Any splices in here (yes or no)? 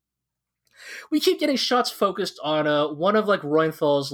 no